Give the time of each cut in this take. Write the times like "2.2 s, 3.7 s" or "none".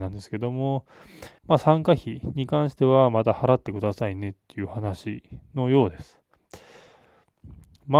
1.4 s